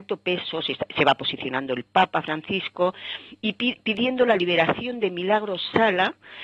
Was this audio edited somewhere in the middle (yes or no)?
no